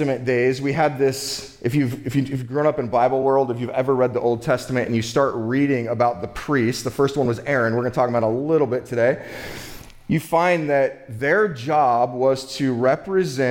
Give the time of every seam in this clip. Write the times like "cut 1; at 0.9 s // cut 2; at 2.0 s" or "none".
none